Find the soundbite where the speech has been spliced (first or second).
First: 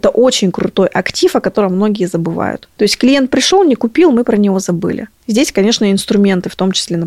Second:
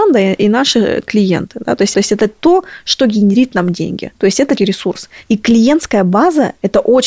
second